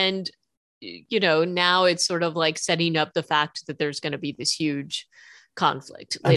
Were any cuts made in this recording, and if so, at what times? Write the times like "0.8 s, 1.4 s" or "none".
none